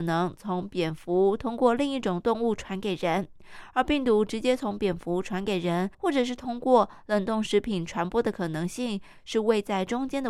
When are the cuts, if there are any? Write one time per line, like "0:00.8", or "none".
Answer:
0:05.9